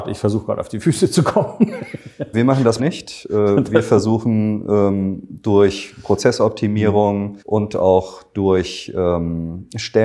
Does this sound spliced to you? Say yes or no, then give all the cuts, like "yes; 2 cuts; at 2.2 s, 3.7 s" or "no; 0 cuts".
yes; 3 cuts; at 2.3 s, 2.8 s, 7.4 s